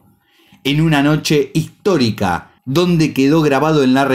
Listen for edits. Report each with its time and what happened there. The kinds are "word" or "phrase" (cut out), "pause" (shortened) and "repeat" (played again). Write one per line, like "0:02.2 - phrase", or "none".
0:02.6 - pause